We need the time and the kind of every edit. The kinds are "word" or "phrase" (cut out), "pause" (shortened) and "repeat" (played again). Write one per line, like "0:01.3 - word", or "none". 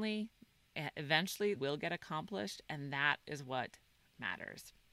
0:01.6 - word